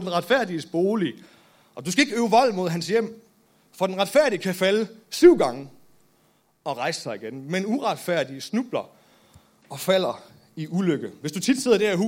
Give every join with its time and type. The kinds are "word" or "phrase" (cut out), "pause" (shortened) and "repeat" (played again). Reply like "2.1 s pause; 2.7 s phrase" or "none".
none

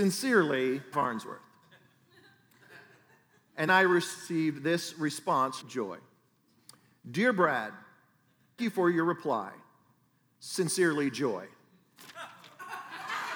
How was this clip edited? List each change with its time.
0.9 s word; 3.7 s word; 5.6 s word; 8.6 s word

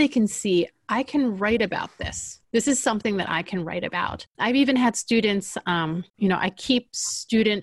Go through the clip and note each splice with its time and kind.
2.4 s pause; 4.3 s pause; 6.1 s pause

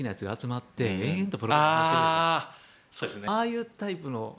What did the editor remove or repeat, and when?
3.0 s phrase

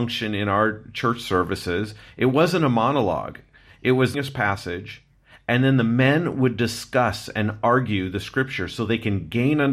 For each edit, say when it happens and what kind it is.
4.1 s phrase

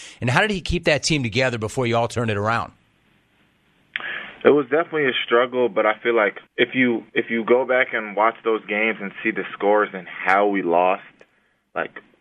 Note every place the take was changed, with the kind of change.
6.5 s pause; 7.1 s pause

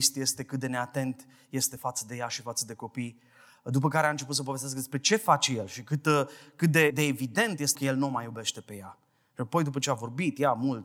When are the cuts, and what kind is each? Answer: 6.9 s word; 7.8 s word

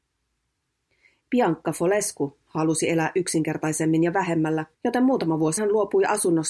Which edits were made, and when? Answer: 4.7 s pause; 5.6 s word

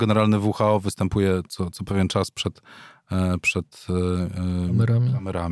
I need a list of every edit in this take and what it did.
none

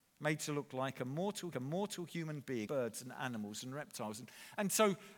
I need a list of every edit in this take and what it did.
1.5 s repeat; 2.7 s word

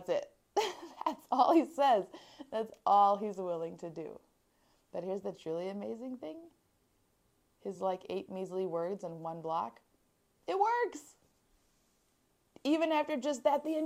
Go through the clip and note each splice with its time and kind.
none

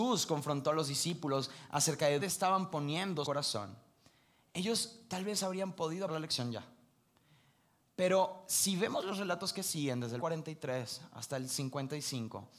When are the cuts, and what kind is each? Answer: 2.2 s word; 3.2 s word; 6.1 s word; 10.2 s word

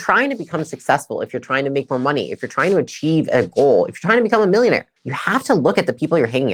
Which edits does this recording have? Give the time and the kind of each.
5.0 s pause

